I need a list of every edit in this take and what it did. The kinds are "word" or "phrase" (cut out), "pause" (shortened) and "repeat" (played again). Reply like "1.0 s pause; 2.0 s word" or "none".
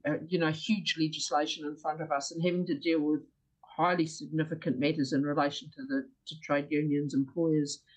none